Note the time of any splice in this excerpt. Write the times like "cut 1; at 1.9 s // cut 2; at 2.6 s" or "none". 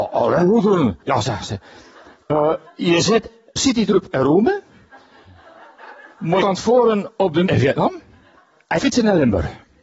cut 1; at 1.0 s // cut 2; at 2.7 s // cut 3; at 3.6 s // cut 4; at 6.4 s // cut 5; at 7.5 s // cut 6; at 8.4 s // cut 7; at 8.8 s